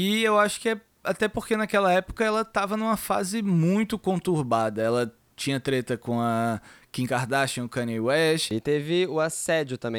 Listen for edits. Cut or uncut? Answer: uncut